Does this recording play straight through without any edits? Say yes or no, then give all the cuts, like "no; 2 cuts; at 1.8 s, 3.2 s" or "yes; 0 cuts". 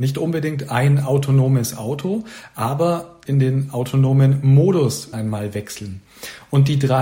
no; 2 cuts; at 3.2 s, 5.1 s